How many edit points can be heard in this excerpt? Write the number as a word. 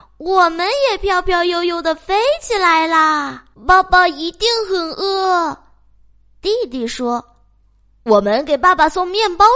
one